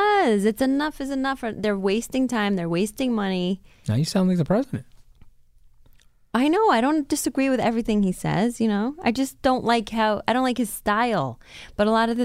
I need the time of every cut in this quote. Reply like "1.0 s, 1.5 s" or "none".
none